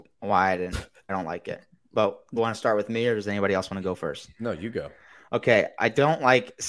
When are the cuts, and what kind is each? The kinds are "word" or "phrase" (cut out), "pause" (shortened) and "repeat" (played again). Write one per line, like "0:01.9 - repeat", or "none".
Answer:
0:01.1 - word
0:02.4 - word